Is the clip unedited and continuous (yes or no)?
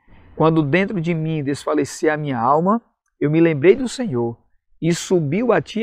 yes